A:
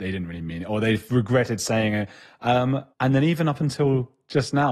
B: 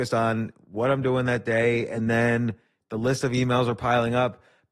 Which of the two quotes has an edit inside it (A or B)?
A